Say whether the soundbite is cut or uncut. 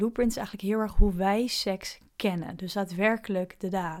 uncut